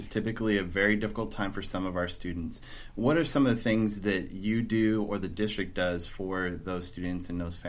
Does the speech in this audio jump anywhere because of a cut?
no; 0 cuts

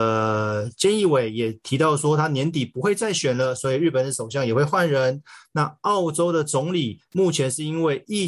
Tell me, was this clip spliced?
yes; 1 cut; at 7.1 s

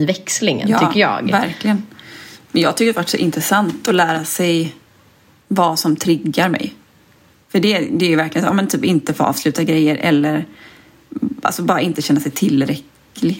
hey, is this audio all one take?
yes; 0 cuts

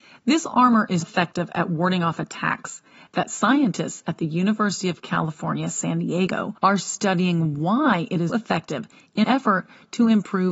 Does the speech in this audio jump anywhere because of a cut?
yes; 4 cuts; at 1.0 s, 6.6 s, 8.3 s, 9.2 s

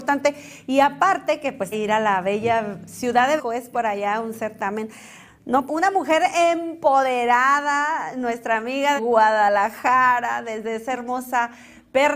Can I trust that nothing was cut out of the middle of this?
no; 4 cuts; at 1.7 s, 3.4 s, 5.7 s, 9.0 s

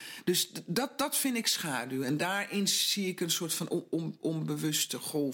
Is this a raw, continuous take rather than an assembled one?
yes; 0 cuts

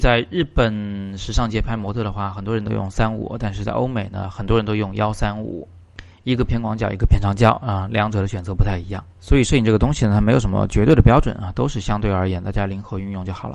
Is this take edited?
yes; 1 cut; at 9.1 s

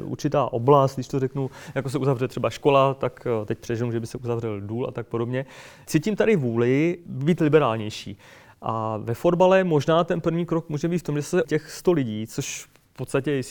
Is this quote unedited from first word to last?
no; 1 cut; at 11.4 s

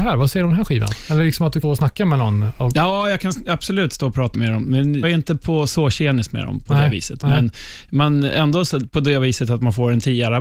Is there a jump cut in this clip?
yes; 3 cuts; at 1.6 s, 4.3 s, 5.0 s

